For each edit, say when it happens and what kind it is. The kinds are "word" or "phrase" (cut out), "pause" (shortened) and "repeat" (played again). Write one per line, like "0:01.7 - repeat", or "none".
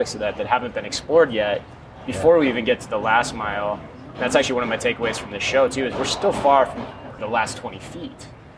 0:07.2 - word